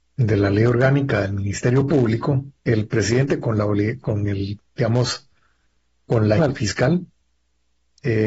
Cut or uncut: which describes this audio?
cut